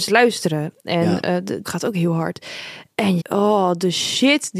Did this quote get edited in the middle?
yes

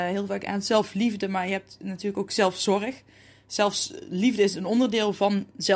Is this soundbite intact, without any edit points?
yes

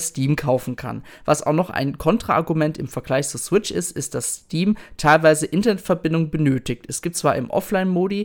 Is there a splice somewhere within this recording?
no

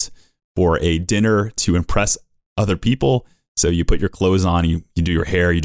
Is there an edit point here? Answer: no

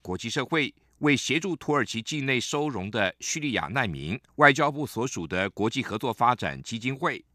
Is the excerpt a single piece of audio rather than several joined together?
no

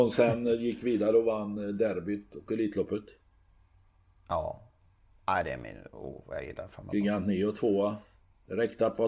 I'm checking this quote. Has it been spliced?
no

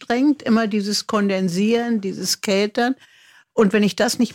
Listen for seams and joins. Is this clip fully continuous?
yes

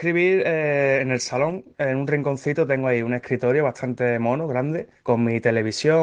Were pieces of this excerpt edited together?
yes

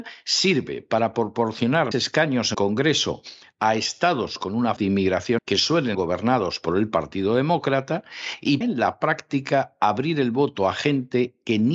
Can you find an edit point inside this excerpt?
yes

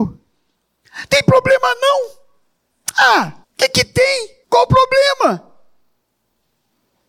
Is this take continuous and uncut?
no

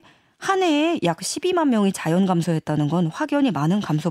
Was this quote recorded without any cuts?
yes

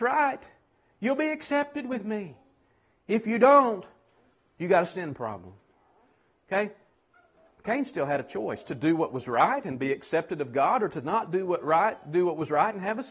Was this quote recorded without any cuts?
yes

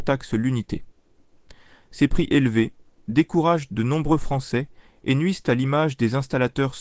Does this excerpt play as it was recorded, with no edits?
yes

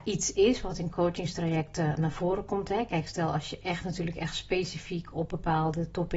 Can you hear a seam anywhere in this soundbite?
no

